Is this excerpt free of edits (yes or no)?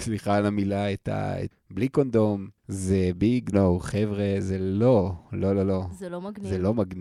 no